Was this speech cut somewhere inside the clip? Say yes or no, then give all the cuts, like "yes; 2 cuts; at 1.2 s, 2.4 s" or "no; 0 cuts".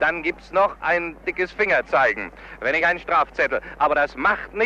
no; 0 cuts